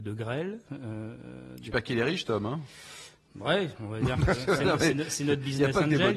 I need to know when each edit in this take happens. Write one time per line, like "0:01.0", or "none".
0:03.3